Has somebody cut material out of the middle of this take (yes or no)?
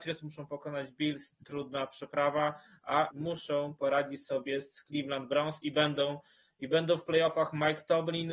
yes